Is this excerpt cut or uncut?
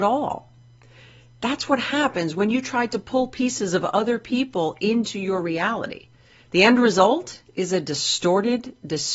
uncut